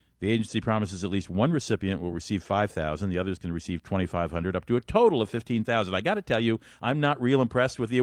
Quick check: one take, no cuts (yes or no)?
yes